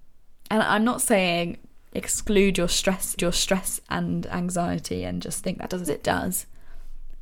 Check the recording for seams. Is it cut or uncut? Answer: cut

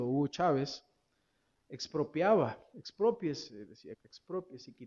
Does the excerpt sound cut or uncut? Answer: cut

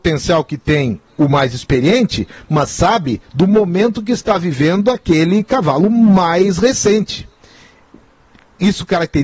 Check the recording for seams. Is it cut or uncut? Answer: uncut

